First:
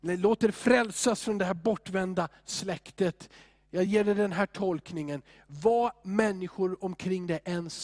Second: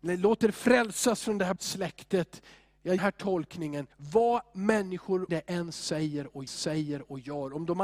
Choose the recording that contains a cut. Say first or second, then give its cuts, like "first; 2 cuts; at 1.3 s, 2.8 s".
second; 5 cuts; at 1.6 s, 3.0 s, 3.9 s, 5.3 s, 6.5 s